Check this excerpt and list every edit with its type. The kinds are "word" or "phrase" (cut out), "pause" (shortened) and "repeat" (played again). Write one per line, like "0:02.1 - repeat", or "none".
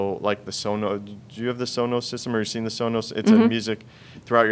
none